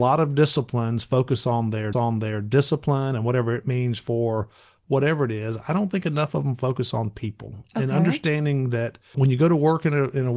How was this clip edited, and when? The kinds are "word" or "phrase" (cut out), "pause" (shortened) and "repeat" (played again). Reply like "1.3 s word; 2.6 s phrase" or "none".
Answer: 1.9 s repeat; 9.1 s word